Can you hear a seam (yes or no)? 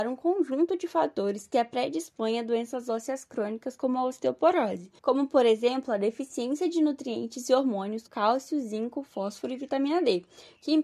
yes